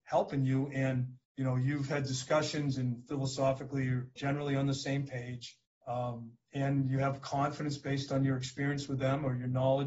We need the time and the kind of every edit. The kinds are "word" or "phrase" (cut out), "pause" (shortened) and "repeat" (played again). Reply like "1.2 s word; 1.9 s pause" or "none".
1.2 s pause; 4.2 s word; 5.7 s pause